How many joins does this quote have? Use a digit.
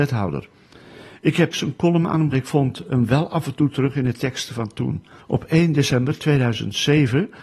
3